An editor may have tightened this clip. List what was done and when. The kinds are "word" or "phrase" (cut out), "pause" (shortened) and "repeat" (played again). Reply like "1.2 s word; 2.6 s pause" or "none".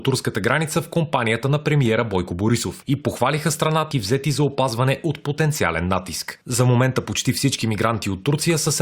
3.9 s phrase